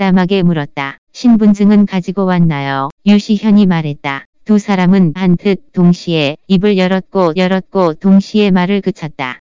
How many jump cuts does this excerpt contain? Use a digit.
5